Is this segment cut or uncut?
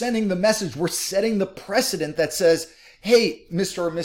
uncut